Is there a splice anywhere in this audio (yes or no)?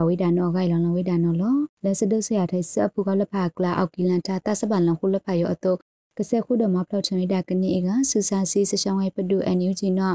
yes